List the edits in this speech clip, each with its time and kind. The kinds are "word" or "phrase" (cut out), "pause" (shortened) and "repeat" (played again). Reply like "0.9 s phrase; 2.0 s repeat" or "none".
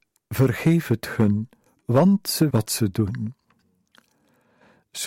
1.7 s pause; 2.5 s phrase